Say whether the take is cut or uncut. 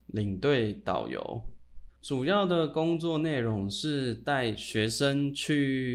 cut